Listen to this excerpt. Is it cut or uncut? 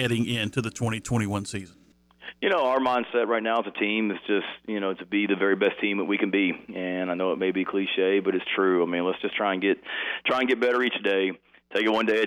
uncut